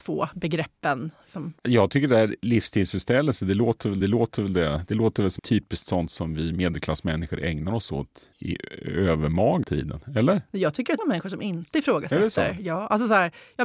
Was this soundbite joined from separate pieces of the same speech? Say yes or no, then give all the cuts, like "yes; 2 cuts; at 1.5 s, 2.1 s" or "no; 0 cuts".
yes; 7 cuts; at 1.6 s, 4.0 s, 5.4 s, 8.3 s, 9.6 s, 10.5 s, 11.0 s